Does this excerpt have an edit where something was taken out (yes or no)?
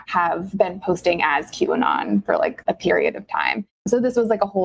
no